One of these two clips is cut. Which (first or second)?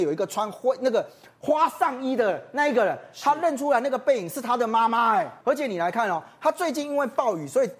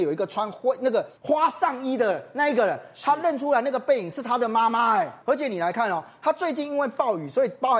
second